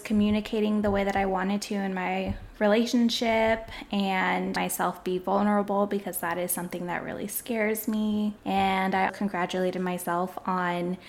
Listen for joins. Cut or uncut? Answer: cut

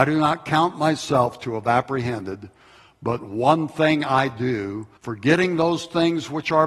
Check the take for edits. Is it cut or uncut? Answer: cut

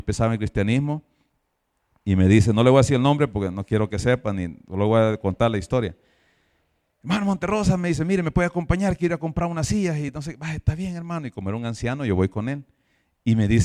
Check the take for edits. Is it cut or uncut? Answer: uncut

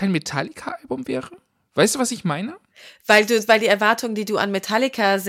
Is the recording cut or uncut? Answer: uncut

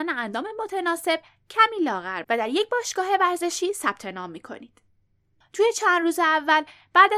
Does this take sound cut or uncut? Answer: cut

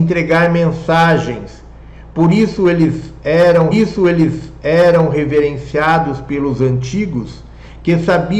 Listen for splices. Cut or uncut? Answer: cut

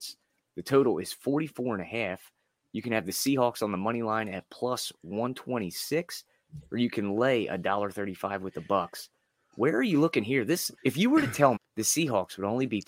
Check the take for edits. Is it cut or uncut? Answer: cut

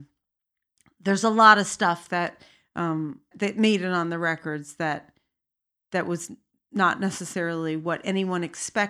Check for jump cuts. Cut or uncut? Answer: cut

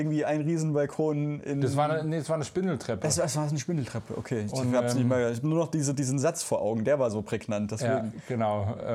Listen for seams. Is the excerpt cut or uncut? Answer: uncut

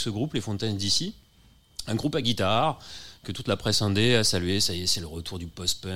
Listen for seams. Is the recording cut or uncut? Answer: uncut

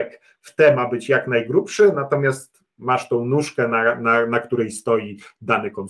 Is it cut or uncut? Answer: uncut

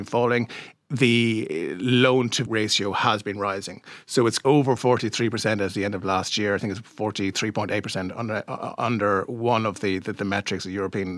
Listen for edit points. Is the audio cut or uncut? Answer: cut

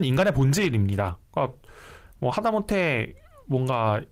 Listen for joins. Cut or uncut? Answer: uncut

